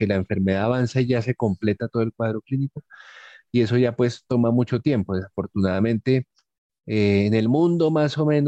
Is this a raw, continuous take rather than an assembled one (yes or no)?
yes